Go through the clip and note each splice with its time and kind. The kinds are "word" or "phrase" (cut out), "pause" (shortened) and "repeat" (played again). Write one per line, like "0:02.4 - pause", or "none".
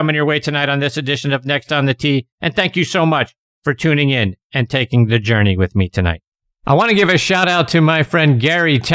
0:02.3 - pause
0:06.3 - pause